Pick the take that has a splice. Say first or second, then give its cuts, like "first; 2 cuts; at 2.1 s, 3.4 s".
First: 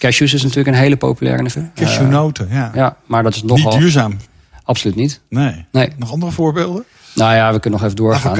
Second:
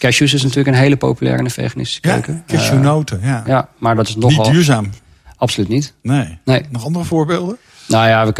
first; 1 cut; at 1.5 s